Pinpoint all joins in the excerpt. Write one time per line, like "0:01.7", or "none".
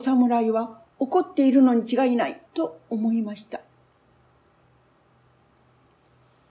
0:02.5

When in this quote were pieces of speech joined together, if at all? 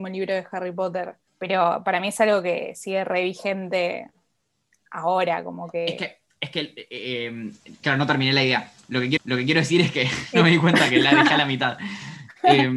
0:01.3
0:09.2

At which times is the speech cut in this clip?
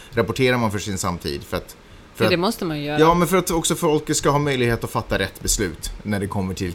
none

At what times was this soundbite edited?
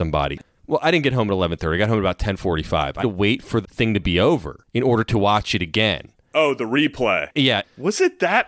0:03.0
0:03.6

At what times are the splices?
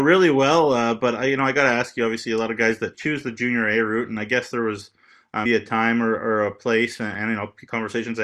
0:02.9
0:05.5

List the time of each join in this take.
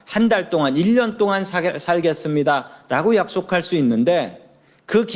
none

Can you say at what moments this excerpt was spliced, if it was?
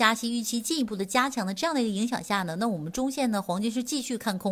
none

